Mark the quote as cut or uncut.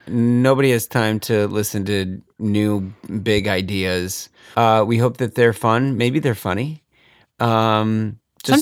uncut